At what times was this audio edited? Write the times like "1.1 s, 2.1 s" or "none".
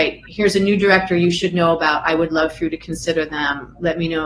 none